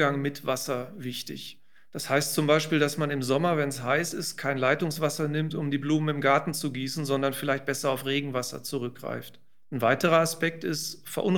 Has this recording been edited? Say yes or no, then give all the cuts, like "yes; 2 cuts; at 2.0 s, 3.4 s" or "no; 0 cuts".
no; 0 cuts